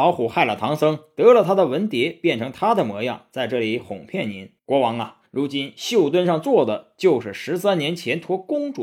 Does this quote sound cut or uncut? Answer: cut